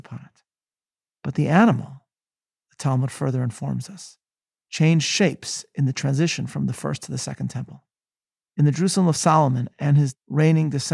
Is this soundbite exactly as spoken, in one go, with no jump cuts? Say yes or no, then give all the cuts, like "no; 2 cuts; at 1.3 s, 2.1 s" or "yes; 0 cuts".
yes; 0 cuts